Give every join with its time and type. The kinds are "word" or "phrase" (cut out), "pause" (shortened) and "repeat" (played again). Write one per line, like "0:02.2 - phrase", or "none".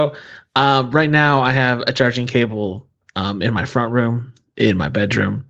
none